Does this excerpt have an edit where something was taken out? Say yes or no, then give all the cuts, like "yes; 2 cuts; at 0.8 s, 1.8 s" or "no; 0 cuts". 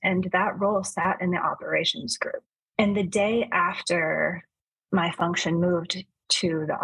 no; 0 cuts